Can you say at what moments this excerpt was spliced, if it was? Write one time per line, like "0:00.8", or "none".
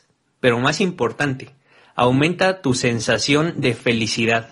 none

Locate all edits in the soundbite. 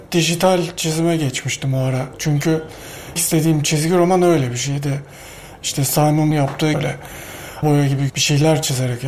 0:03.2
0:06.3
0:06.7
0:07.6
0:08.1

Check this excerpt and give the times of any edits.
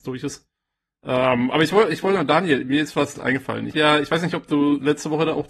0:03.2
0:03.7

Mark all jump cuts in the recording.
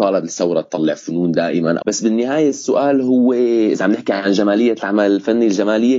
0:01.8

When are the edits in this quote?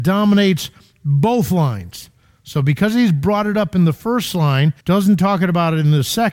0:04.8

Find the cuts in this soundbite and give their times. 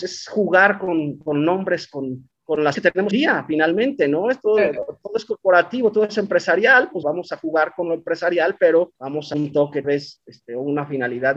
0:02.3
0:02.7
0:03.1
0:07.0
0:09.0
0:09.3
0:09.8

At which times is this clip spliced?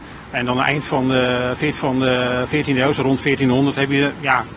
0:01.7

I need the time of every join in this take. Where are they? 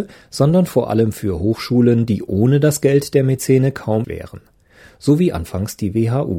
0:04.0

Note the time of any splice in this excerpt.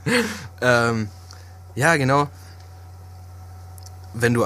none

